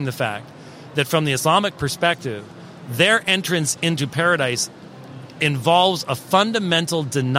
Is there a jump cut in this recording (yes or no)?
no